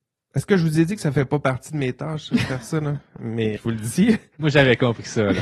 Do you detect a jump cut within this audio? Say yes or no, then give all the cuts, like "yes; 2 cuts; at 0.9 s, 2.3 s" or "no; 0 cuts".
yes; 1 cut; at 3.6 s